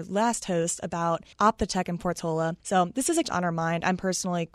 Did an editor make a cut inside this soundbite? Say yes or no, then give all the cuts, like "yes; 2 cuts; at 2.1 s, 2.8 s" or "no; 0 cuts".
yes; 3 cuts; at 1.3 s, 2.6 s, 3.2 s